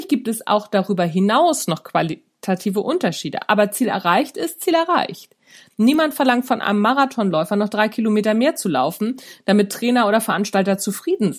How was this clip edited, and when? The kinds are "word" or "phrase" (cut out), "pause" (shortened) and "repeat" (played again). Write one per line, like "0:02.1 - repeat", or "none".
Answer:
none